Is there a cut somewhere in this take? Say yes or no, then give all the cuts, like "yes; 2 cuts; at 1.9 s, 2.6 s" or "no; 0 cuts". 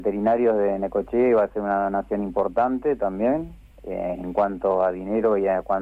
no; 0 cuts